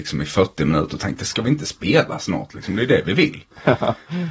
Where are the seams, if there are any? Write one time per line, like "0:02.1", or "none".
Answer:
none